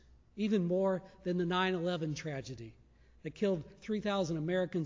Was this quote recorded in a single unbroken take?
yes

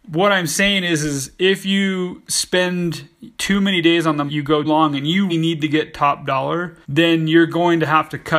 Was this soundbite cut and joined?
yes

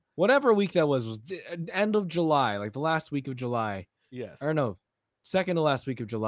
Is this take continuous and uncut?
yes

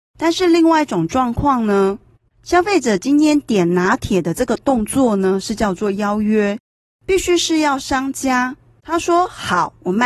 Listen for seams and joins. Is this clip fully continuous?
yes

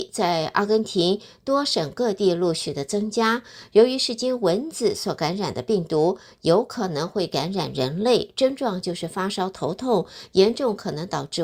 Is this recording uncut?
yes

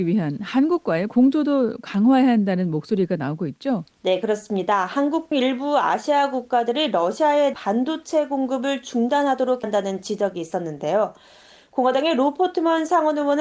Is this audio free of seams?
no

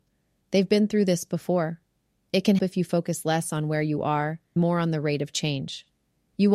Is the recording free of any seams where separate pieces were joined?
no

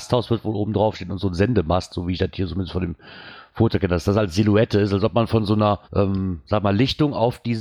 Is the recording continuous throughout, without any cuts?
no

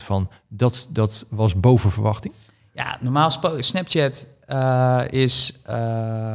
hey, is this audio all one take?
yes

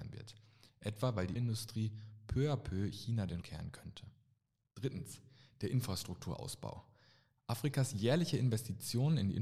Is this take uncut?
no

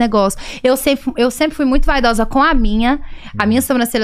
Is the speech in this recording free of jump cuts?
yes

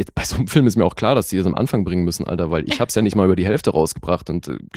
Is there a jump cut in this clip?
no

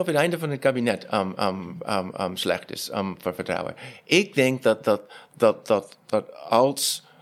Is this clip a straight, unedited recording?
yes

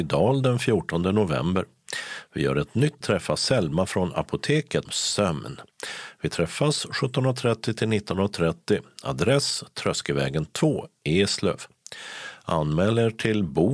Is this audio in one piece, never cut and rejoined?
no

